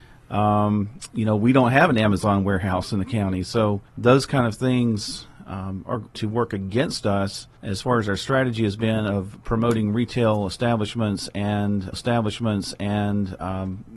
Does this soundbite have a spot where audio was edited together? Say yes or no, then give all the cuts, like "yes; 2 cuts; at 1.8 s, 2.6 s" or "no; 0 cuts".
yes; 4 cuts; at 3.9 s, 6.1 s, 7.6 s, 11.9 s